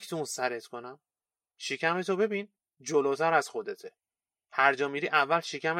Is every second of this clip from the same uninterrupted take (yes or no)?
yes